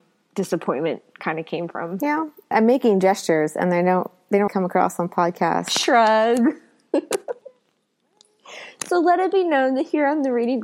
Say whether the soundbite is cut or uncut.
cut